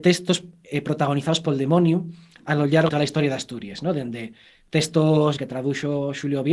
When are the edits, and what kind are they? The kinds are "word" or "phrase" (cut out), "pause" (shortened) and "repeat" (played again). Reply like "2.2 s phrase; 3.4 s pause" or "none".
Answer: 2.9 s word; 5.4 s word